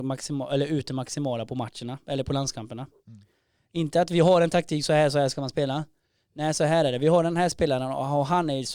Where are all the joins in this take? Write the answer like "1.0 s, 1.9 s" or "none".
none